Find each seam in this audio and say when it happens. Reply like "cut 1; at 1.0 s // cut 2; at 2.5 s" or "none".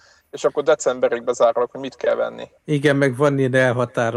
cut 1; at 2.6 s